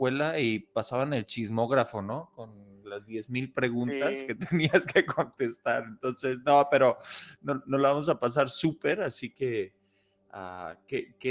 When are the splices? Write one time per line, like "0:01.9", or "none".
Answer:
none